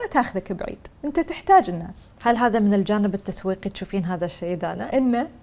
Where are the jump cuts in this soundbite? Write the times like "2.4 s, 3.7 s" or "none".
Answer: 1.0 s, 2.2 s